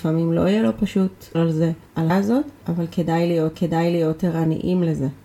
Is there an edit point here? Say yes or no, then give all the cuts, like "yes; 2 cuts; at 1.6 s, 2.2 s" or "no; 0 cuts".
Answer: yes; 3 cuts; at 1.3 s, 2.1 s, 3.5 s